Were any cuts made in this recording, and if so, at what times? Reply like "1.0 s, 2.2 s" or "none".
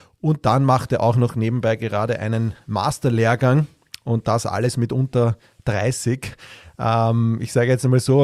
none